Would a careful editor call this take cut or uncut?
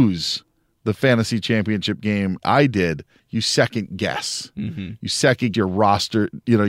cut